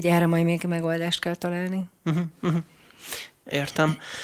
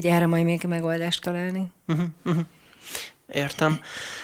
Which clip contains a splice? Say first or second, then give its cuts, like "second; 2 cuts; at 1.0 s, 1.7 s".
second; 1 cut; at 1.2 s